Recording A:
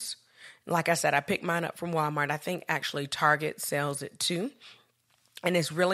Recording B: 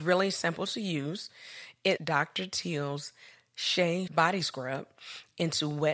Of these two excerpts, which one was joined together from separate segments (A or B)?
B